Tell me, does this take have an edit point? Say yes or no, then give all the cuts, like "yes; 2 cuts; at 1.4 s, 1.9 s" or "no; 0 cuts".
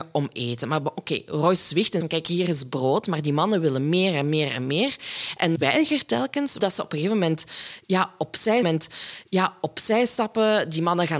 yes; 4 cuts; at 2.0 s, 5.6 s, 6.6 s, 8.6 s